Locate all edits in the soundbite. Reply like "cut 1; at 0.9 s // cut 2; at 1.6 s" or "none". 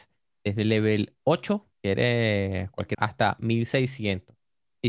cut 1; at 1.7 s // cut 2; at 2.9 s

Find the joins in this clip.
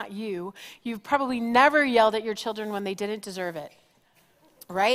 none

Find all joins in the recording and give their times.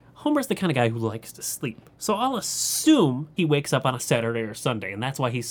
cut 1; at 1.9 s // cut 2; at 3.4 s

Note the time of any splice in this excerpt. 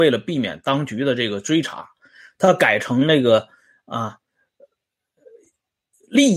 none

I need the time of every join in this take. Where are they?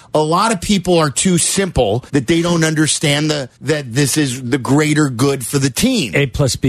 cut 1; at 2.1 s // cut 2; at 3.6 s

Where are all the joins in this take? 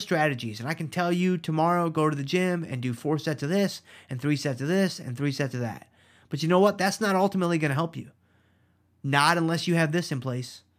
none

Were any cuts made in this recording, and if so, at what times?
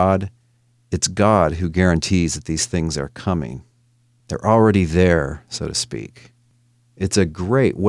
none

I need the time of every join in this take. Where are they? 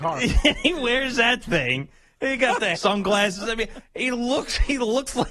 cut 1; at 2.8 s

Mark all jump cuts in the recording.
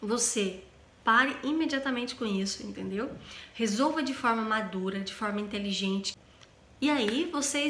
none

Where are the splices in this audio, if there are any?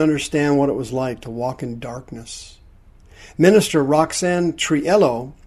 none

